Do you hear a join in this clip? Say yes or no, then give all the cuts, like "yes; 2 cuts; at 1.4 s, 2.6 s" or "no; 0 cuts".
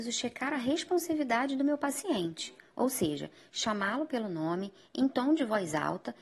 no; 0 cuts